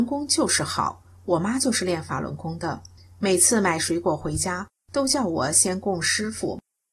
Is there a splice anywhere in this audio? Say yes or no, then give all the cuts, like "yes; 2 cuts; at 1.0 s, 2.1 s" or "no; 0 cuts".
no; 0 cuts